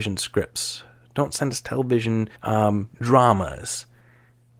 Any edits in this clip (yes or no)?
yes